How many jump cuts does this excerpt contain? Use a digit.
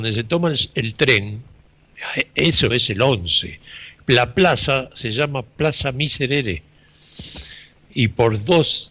1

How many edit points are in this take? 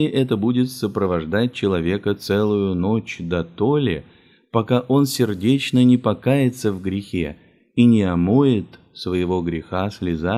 0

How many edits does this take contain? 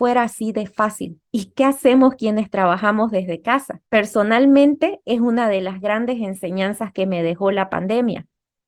2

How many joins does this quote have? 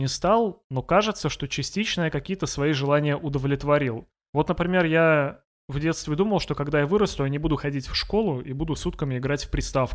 0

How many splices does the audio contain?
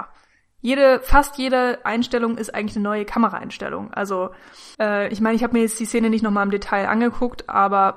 1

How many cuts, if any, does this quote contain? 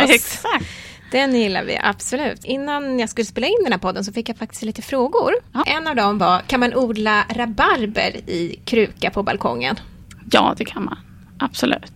0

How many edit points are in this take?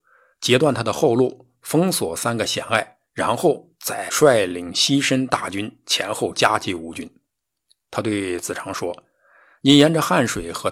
1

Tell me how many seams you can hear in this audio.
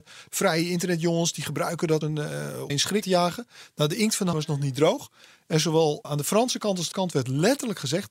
6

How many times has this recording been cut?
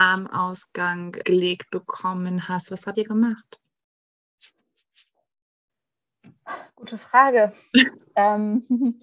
2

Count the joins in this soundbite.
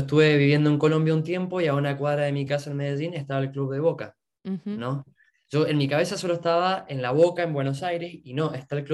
0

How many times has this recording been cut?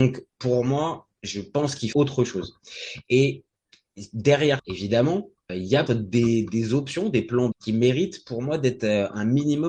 6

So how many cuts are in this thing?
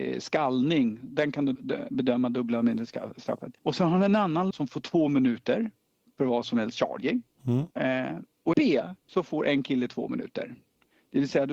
6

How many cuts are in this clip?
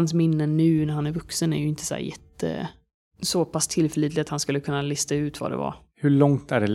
0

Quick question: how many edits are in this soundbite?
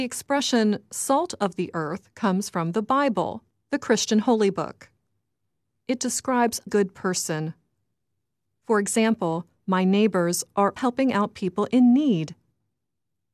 2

